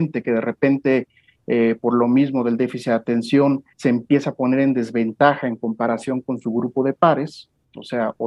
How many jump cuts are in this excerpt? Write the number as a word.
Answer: one